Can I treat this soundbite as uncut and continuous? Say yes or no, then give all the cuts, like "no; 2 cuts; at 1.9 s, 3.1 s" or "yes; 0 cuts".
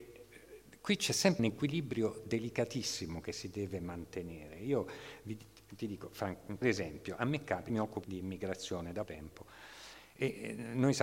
no; 5 cuts; at 1.4 s, 6.6 s, 7.7 s, 8.0 s, 9.1 s